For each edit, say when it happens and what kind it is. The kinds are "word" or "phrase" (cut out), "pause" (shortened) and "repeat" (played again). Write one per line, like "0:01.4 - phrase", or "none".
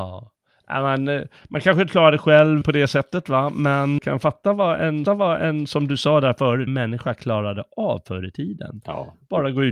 0:01.9 - word
0:02.6 - word
0:04.0 - word
0:05.1 - repeat
0:06.7 - phrase